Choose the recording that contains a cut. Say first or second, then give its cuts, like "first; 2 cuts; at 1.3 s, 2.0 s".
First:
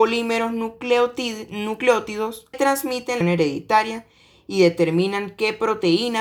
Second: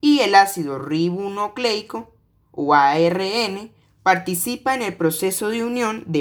first; 2 cuts; at 2.5 s, 3.2 s